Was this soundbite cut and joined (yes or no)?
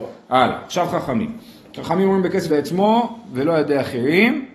yes